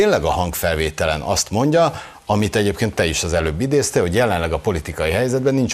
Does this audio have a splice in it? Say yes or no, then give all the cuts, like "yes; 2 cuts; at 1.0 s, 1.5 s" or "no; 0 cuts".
no; 0 cuts